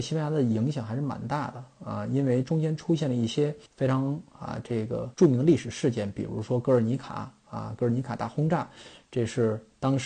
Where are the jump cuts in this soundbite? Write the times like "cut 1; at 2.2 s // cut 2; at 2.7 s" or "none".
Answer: cut 1; at 3.7 s // cut 2; at 5.1 s